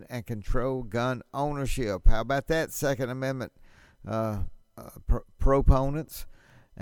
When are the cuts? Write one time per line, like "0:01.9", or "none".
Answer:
none